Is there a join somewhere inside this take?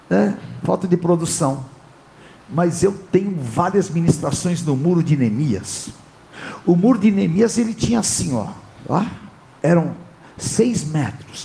no; 0 cuts

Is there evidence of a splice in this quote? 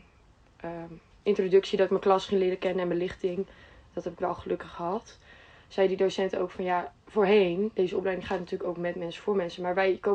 no; 0 cuts

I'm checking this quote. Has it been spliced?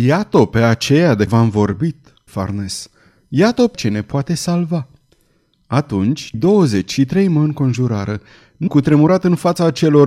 yes; 5 cuts; at 1.3 s, 2.3 s, 3.7 s, 6.3 s, 8.7 s

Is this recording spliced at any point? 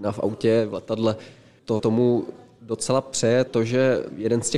yes; 2 cuts; at 1.8 s, 3.5 s

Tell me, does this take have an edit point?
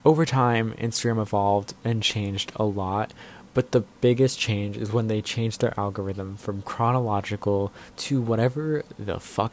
no; 0 cuts

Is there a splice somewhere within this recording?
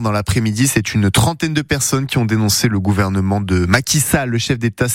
no; 0 cuts

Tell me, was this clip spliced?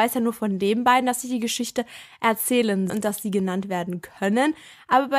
yes; 1 cut; at 2.9 s

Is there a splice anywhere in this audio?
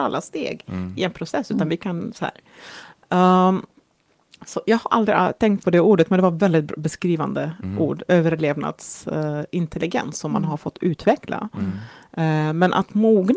no; 0 cuts

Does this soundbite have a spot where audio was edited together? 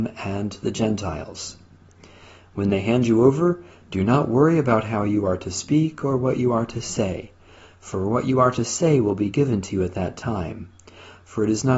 no; 0 cuts

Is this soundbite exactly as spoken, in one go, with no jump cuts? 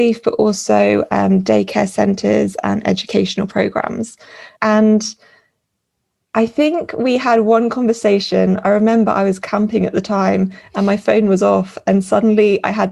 yes; 0 cuts

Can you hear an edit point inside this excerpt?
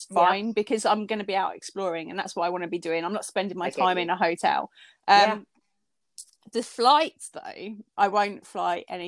yes; 1 cut; at 7.9 s

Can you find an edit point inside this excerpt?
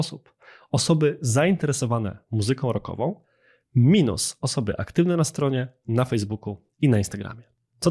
no; 0 cuts

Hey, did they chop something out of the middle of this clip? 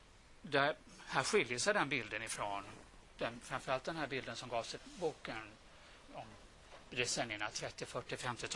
yes; 2 cuts; at 4.8 s, 6.1 s

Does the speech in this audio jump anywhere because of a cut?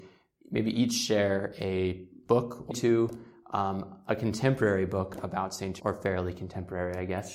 yes; 2 cuts; at 2.7 s, 5.8 s

